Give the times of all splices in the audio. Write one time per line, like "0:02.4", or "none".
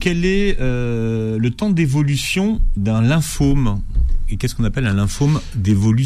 0:02.8